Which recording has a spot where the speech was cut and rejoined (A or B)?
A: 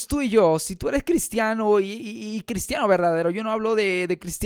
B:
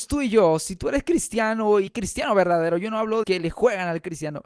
B